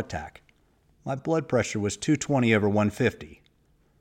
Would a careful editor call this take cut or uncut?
uncut